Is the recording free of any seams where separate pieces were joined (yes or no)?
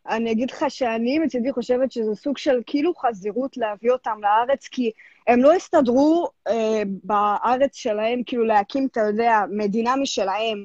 yes